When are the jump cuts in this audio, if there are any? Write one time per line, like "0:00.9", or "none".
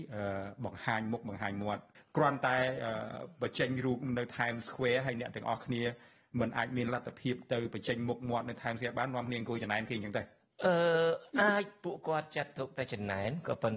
none